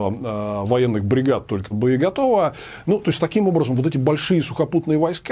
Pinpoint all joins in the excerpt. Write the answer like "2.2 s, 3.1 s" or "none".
1.7 s